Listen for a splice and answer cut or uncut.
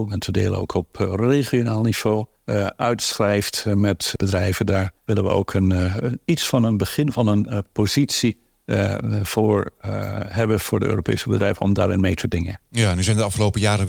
cut